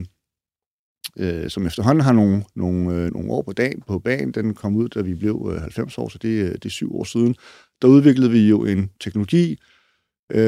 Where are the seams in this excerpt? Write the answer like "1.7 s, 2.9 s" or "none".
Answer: 3.1 s